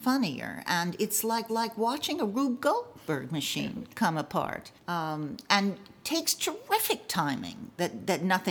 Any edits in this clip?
yes; 2 cuts; at 1.5 s, 4.8 s

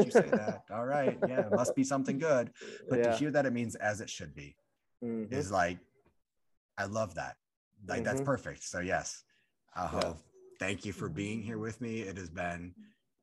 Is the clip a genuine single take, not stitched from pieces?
yes; 0 cuts

